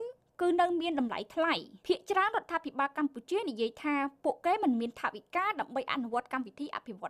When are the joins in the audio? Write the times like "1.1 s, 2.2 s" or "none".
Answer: 1.8 s